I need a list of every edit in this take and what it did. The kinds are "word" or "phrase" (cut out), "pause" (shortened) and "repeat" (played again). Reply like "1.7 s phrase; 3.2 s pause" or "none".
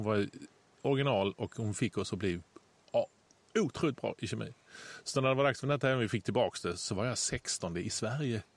none